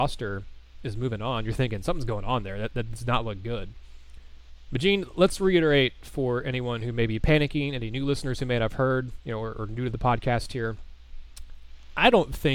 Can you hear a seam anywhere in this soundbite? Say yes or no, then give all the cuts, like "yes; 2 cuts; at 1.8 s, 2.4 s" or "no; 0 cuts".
no; 0 cuts